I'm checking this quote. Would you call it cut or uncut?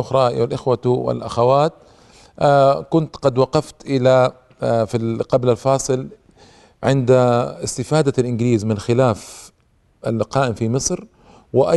uncut